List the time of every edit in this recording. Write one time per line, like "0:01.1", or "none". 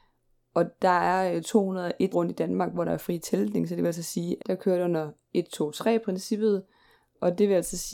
0:02.1
0:04.4

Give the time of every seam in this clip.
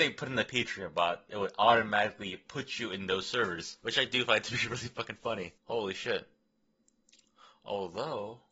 0:03.8
0:05.6

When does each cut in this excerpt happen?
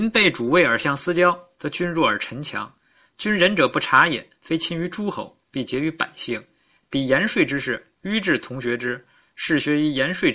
none

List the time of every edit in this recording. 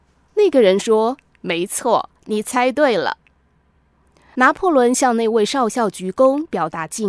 none

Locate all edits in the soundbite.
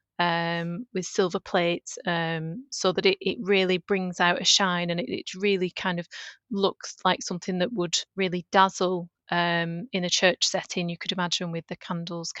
0:08.1

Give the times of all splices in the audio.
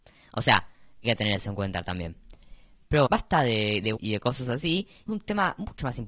0:01.0
0:03.1
0:04.0
0:05.1

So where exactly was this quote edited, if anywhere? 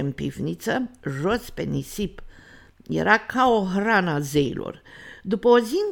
none

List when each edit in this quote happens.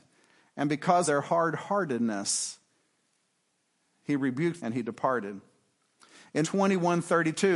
0:01.1
0:04.6
0:06.4

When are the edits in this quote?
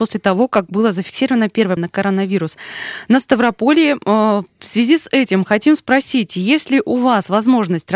0:01.8

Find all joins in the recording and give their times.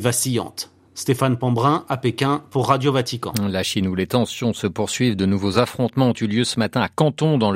none

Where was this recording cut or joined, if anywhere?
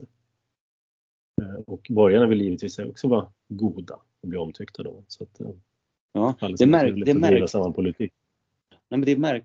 none

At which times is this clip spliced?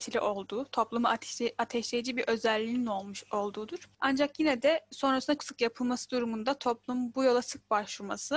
0:05.4

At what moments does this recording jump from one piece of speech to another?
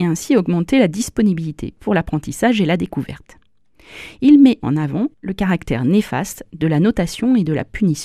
0:01.8
0:04.6
0:05.1

